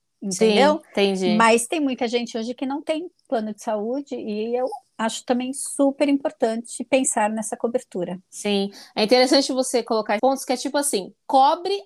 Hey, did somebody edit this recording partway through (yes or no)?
yes